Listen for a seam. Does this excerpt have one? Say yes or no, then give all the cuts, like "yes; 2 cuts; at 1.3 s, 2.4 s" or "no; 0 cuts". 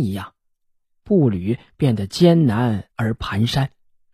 yes; 1 cut; at 2.9 s